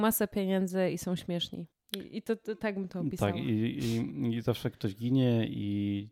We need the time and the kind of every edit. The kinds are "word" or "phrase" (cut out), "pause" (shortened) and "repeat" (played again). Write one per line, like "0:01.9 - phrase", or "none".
0:01.7 - pause